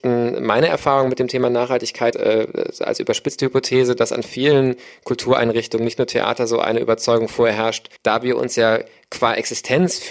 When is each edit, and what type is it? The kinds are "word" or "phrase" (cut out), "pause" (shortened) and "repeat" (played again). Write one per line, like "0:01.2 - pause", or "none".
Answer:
0:02.1 - word
0:08.0 - pause